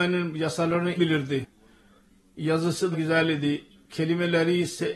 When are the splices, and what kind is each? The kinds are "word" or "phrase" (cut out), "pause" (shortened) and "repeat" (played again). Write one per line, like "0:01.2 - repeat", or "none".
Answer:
0:01.0 - word
0:02.9 - word